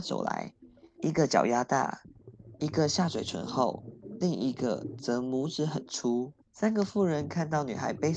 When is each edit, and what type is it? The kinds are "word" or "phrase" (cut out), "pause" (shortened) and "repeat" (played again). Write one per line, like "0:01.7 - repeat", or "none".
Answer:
0:06.4 - pause